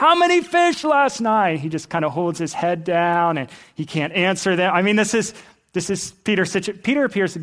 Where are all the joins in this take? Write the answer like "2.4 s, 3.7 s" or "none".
none